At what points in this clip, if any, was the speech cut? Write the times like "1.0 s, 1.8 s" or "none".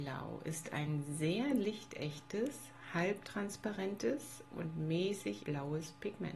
5.4 s